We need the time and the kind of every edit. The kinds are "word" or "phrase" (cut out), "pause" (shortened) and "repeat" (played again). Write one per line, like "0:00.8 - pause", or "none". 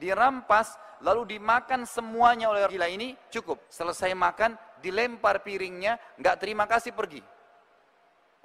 0:02.7 - word
0:03.3 - word
0:03.6 - pause